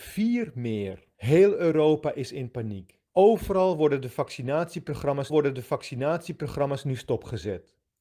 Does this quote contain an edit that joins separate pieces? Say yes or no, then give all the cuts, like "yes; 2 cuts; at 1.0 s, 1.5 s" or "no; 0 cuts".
yes; 3 cuts; at 1.1 s, 3.1 s, 5.3 s